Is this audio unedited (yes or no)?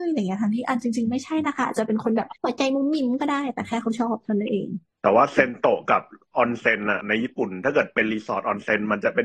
no